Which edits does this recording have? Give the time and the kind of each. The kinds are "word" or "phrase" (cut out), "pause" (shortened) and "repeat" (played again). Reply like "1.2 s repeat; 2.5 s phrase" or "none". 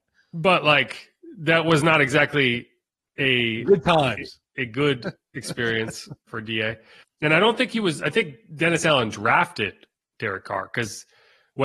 6.3 s word